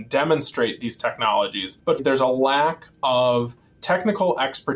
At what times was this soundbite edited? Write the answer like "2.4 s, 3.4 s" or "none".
2.0 s